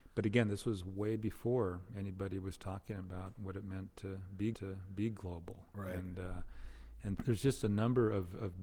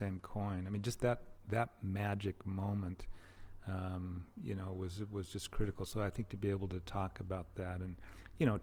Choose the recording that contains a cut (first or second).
first